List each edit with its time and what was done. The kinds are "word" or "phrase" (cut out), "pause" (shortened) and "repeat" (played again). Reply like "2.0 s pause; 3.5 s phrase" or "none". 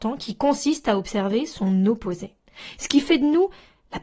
none